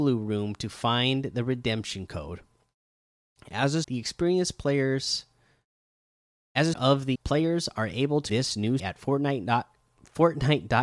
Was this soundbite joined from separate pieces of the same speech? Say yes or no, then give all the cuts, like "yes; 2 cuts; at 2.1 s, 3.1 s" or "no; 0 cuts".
yes; 5 cuts; at 3.8 s, 6.7 s, 7.1 s, 8.3 s, 8.8 s